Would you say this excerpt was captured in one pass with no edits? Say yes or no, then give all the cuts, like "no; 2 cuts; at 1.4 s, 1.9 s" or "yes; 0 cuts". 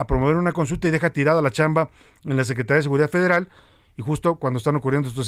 yes; 0 cuts